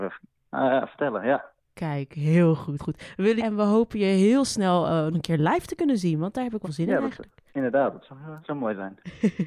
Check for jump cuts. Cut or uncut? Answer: cut